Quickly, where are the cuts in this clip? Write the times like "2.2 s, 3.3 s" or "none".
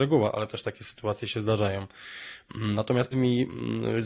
3.1 s